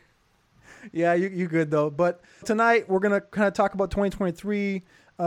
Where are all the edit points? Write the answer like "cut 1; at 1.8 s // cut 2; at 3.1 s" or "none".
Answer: cut 1; at 2.4 s